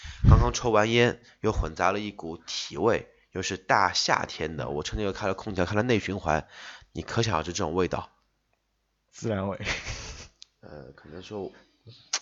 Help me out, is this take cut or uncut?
uncut